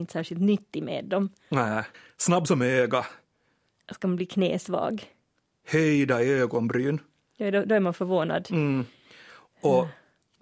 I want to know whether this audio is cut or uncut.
cut